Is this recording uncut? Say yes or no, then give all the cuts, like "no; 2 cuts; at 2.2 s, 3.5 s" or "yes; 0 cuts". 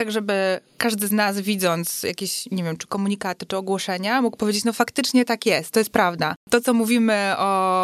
yes; 0 cuts